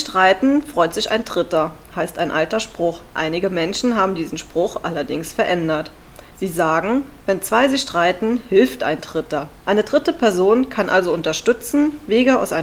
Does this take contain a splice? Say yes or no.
yes